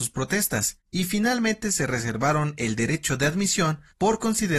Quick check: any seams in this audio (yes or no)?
no